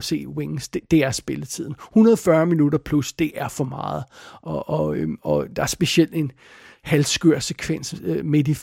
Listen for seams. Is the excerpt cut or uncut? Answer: uncut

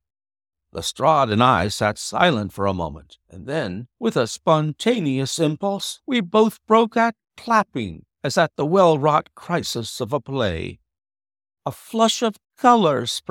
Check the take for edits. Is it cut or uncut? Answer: uncut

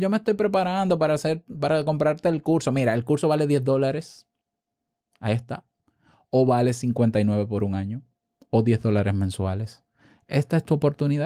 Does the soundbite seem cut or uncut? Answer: uncut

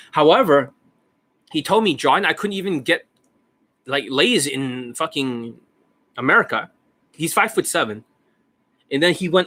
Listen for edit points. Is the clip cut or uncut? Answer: uncut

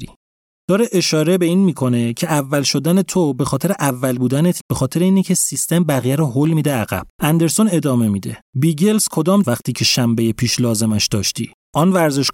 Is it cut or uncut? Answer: cut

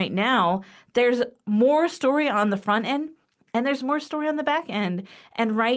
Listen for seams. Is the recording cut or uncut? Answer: uncut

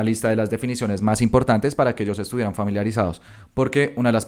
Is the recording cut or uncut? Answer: uncut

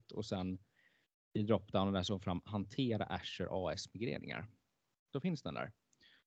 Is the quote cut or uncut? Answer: uncut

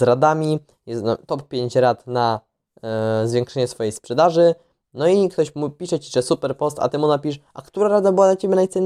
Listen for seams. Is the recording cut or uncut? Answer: uncut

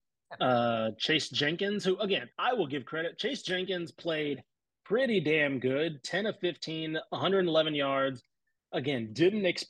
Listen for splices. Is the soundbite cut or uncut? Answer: cut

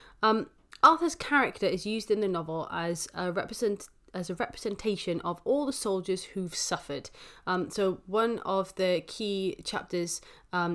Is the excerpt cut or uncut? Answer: uncut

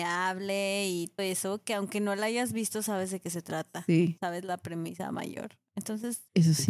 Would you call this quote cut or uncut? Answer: cut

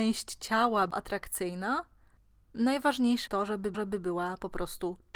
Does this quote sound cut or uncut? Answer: cut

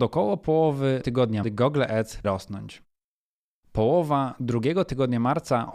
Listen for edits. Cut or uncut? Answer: cut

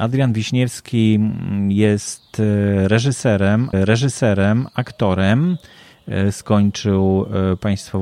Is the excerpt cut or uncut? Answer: cut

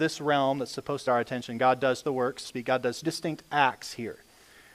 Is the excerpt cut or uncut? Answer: cut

